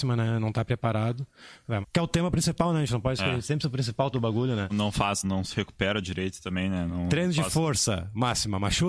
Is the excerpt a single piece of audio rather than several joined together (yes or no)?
no